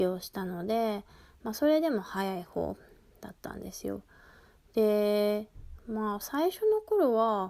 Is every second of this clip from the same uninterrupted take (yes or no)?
yes